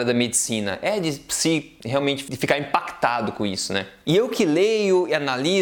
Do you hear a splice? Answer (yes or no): yes